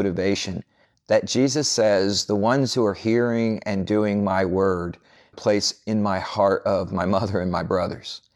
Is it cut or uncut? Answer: cut